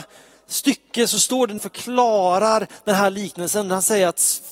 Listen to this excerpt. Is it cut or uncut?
cut